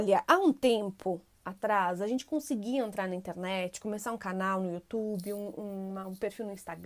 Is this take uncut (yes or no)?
yes